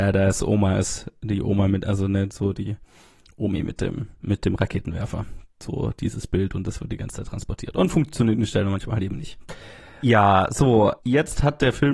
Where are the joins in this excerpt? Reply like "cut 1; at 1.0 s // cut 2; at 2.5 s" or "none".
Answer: none